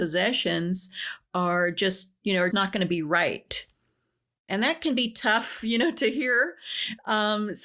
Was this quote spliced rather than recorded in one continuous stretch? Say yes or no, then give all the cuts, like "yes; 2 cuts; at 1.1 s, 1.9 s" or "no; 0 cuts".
yes; 1 cut; at 2.5 s